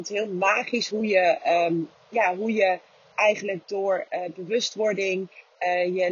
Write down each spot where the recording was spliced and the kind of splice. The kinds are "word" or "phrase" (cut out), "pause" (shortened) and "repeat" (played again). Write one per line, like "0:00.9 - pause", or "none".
none